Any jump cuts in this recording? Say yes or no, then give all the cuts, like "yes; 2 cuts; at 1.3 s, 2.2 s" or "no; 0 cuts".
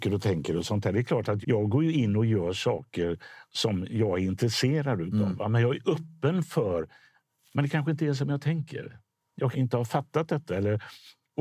yes; 2 cuts; at 1.4 s, 9.5 s